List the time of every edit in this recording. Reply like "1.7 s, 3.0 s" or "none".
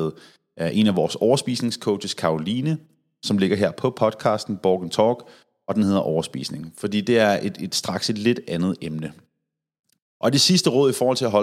none